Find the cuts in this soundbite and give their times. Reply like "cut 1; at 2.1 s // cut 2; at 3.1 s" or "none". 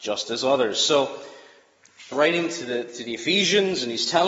cut 1; at 2.1 s